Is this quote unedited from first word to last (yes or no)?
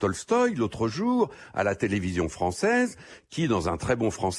yes